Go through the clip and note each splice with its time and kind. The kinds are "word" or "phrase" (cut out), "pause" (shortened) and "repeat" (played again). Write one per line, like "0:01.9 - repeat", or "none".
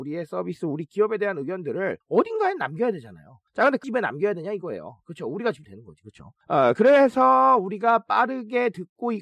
0:02.0 - pause
0:03.5 - pause
0:03.8 - phrase
0:05.6 - word
0:06.4 - pause